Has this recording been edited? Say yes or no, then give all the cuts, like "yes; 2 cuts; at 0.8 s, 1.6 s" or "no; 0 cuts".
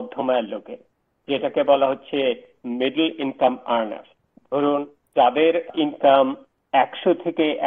no; 0 cuts